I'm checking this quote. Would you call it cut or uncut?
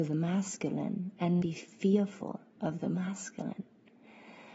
cut